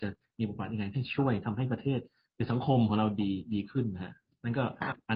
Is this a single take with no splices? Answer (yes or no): yes